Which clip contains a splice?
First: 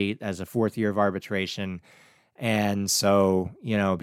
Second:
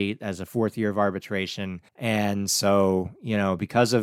second; 1 cut; at 1.9 s

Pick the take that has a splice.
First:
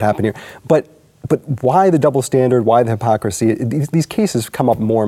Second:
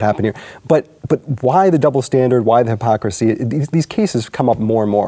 second; 1 cut; at 1.0 s

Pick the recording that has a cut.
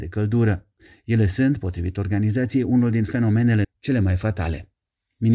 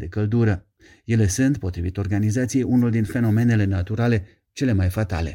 first; 1 cut; at 3.6 s

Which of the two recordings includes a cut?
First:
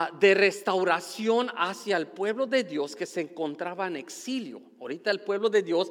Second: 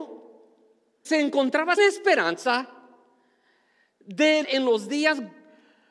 second; 3 cuts; at 1.0 s, 1.8 s, 4.4 s

